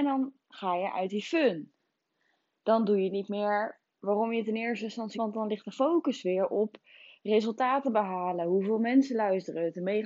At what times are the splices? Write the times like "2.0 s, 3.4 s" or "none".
5.1 s